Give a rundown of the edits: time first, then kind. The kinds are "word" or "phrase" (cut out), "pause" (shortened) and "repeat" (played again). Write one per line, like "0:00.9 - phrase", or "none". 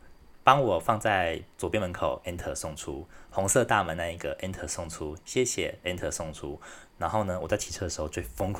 none